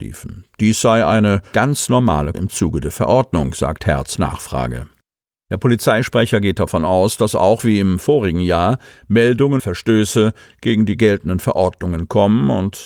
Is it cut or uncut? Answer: cut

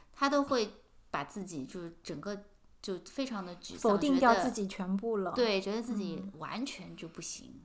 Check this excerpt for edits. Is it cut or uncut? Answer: uncut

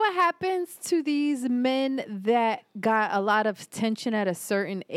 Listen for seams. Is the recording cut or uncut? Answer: uncut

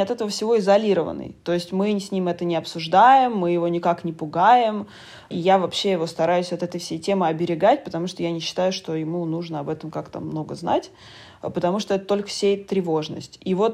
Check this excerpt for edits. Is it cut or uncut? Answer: uncut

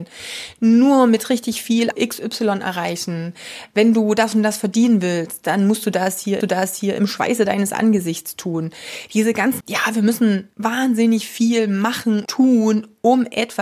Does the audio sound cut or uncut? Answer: cut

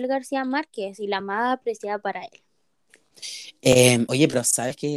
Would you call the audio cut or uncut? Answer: uncut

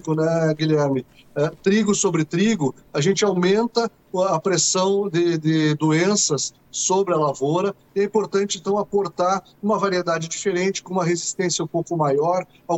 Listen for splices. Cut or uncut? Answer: uncut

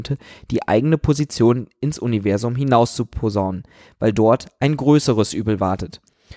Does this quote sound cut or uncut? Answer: uncut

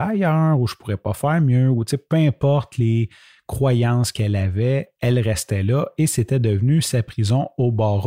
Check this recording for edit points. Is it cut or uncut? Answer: uncut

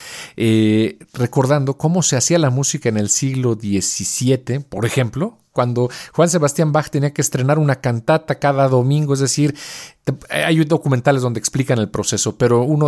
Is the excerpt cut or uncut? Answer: uncut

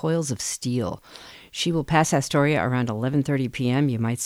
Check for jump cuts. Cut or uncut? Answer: uncut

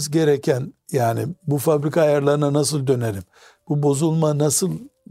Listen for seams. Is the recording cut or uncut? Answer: uncut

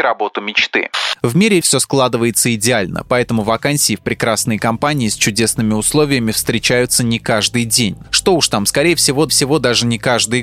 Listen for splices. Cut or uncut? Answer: cut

